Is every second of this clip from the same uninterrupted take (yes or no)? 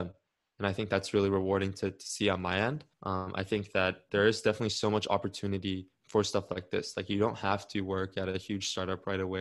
no